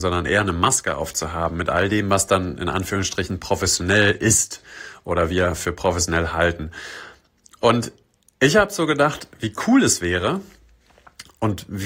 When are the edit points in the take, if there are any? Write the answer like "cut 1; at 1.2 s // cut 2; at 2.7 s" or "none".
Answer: none